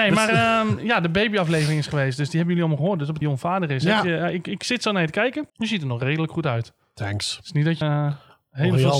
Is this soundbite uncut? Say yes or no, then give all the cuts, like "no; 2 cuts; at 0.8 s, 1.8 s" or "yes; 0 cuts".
no; 3 cuts; at 3.2 s, 5.5 s, 7.8 s